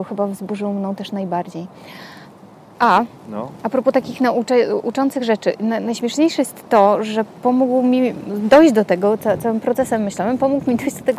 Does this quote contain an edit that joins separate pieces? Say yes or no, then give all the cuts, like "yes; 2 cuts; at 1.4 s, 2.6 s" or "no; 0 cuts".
no; 0 cuts